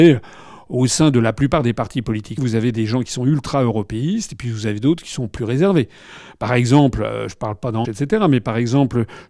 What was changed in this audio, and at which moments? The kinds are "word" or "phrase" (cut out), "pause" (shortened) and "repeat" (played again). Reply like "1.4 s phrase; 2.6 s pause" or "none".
2.4 s word; 7.8 s word